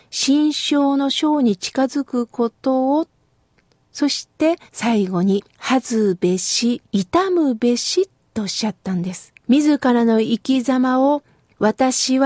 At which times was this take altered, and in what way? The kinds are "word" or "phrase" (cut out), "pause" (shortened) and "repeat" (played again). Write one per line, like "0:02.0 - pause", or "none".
0:04.7 - pause
0:05.5 - pause
0:06.9 - pause
0:09.4 - pause

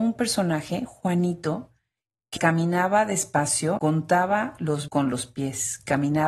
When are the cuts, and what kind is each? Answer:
0:02.4 - word
0:03.8 - word
0:04.9 - word

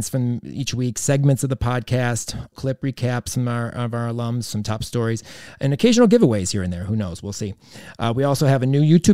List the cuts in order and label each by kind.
0:02.5 - word

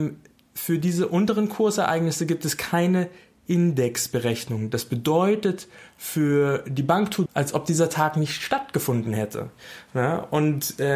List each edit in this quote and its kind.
0:07.3 - word

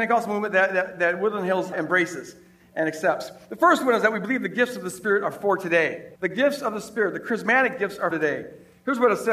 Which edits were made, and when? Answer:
0:01.7 - word
0:06.2 - pause
0:08.1 - word

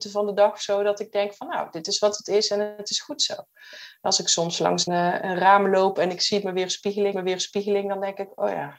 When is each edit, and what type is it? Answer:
0:04.9 - word
0:07.1 - repeat

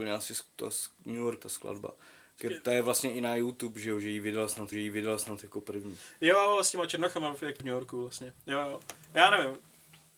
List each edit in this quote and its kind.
0:01.4 - word
0:04.7 - repeat
0:07.6 - word
0:08.4 - pause
0:09.0 - pause

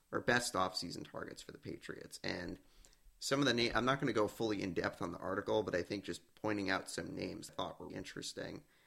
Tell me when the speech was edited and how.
0:07.5 - phrase
0:07.9 - word

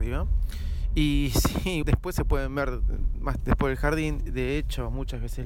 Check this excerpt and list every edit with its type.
0:01.8 - word
0:03.4 - word
0:04.3 - word

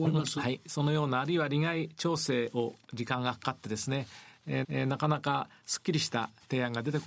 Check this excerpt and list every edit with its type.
0:04.6 - repeat

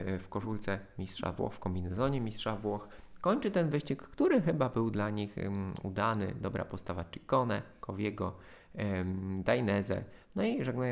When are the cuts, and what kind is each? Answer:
none

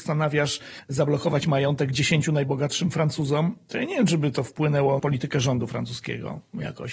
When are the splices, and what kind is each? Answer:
0:05.0 - word

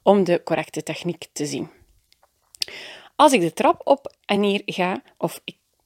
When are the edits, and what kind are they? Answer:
none

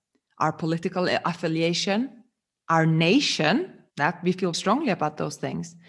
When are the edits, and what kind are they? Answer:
0:03.9 - pause
0:04.5 - word

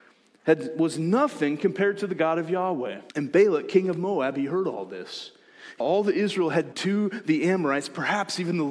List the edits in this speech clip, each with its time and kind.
0:03.1 - pause
0:05.8 - word
0:06.7 - word

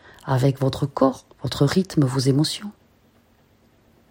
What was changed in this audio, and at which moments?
0:01.3 - pause

